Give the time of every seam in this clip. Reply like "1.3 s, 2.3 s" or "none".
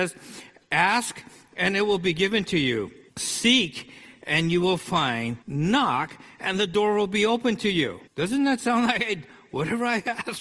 3.1 s, 5.4 s, 8.1 s